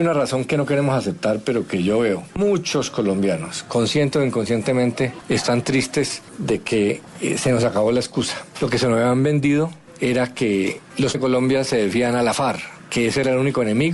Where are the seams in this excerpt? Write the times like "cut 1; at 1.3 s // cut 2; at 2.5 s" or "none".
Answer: cut 1; at 11.1 s